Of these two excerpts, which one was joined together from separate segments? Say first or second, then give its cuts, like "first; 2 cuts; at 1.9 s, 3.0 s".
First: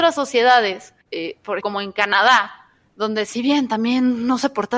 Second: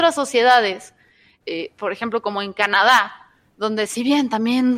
first; 2 cuts; at 1.0 s, 1.6 s